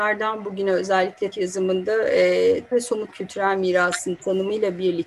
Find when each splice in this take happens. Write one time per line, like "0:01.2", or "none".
0:01.3
0:02.7
0:03.1